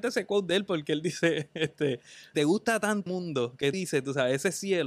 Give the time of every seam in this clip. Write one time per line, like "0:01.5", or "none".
0:02.3
0:03.1
0:03.7